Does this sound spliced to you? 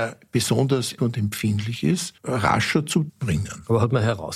yes; 3 cuts; at 1.0 s, 2.2 s, 3.1 s

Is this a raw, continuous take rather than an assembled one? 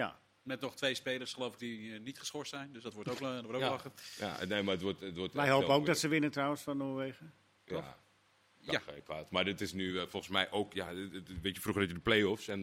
yes; 0 cuts

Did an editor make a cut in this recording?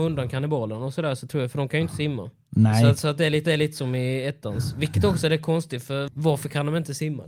yes; 2 cuts; at 3.4 s, 6.1 s

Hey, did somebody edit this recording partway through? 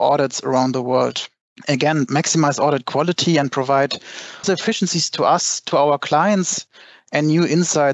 yes; 2 cuts; at 2.1 s, 4.4 s

